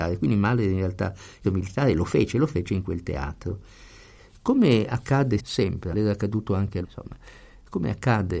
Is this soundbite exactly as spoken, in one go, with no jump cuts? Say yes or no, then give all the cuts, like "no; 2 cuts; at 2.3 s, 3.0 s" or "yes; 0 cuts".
no; 4 cuts; at 1.4 s, 5.4 s, 5.9 s, 6.8 s